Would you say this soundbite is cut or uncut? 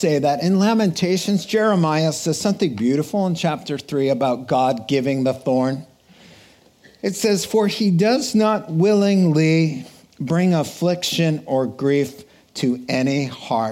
uncut